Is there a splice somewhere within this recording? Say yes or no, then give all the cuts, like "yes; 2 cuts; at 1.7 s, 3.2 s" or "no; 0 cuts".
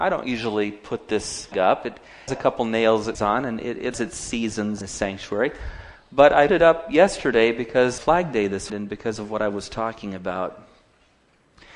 yes; 8 cuts; at 1.5 s, 2.3 s, 3.1 s, 3.9 s, 4.8 s, 6.5 s, 8.0 s, 8.7 s